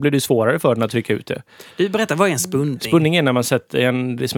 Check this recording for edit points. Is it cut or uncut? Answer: uncut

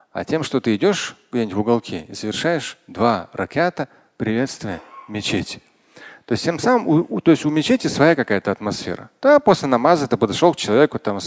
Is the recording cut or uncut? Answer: uncut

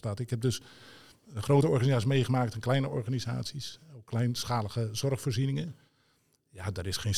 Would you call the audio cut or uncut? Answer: uncut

